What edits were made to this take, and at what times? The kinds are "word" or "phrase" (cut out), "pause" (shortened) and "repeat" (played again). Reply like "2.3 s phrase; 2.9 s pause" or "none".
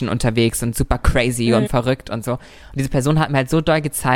1.7 s phrase